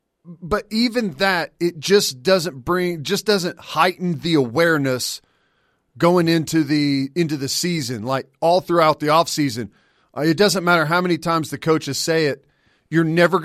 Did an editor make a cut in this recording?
no; 0 cuts

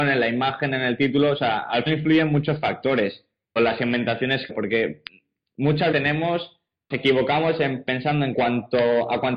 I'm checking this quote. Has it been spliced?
yes; 6 cuts; at 1.9 s, 3.6 s, 4.5 s, 5.9 s, 6.9 s, 8.3 s

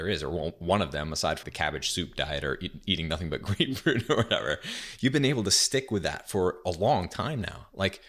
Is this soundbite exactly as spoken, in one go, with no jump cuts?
no; 1 cut; at 1.4 s

